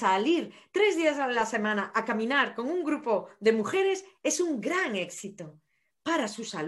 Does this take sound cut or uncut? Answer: uncut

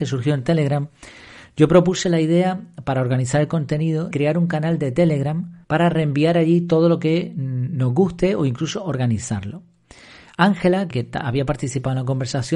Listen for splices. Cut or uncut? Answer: cut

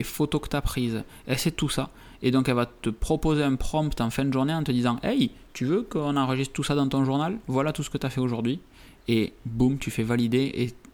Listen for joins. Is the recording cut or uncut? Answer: uncut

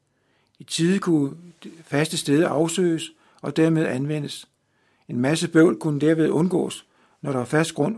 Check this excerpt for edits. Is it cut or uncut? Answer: uncut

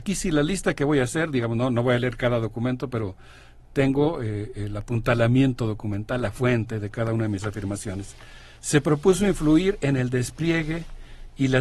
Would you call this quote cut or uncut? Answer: cut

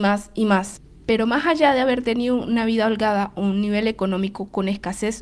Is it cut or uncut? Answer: uncut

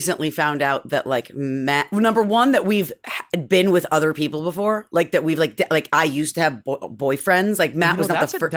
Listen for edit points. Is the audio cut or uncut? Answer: uncut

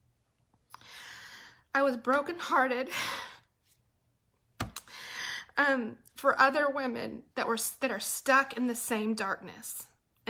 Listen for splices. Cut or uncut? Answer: cut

